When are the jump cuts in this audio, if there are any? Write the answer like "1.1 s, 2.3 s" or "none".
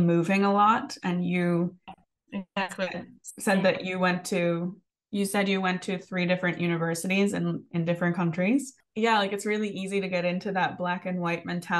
none